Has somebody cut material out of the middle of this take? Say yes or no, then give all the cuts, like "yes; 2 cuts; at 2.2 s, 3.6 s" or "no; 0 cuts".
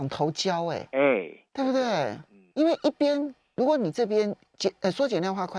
yes; 2 cuts; at 1.5 s, 2.5 s